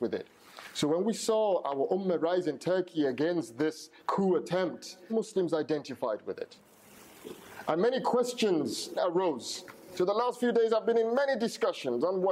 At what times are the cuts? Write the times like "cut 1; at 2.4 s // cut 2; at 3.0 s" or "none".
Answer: cut 1; at 4.0 s // cut 2; at 5.1 s // cut 3; at 9.0 s